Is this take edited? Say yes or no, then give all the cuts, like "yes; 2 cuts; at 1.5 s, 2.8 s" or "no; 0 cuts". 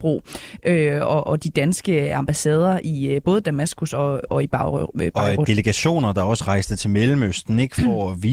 yes; 1 cut; at 1.2 s